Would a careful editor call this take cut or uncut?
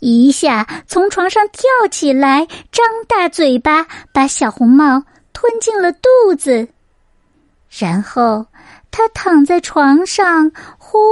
uncut